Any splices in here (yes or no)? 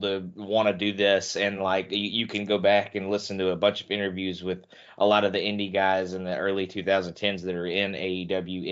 no